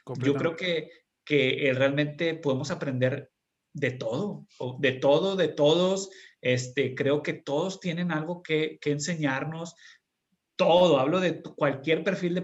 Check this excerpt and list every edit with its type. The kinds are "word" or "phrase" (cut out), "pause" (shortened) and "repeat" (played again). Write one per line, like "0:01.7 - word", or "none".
none

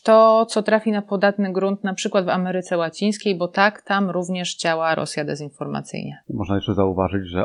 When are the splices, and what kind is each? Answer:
none

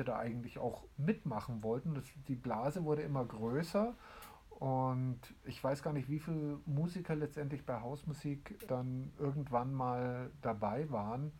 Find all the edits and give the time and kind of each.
0:08.7 - word

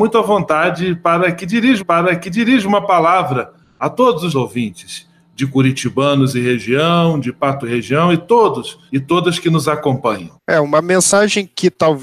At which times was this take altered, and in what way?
0:01.8 - repeat
0:03.6 - pause
0:04.3 - word
0:07.6 - word
0:08.9 - pause
0:10.4 - pause

